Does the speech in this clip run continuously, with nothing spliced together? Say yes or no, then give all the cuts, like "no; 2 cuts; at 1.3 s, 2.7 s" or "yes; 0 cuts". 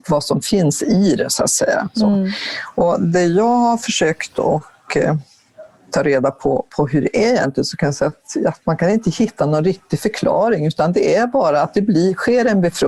yes; 0 cuts